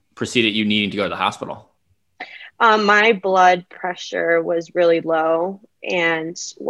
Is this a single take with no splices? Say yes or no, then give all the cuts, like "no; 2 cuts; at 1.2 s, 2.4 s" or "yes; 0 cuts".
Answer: yes; 0 cuts